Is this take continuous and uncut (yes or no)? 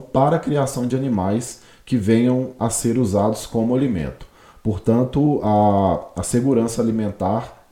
yes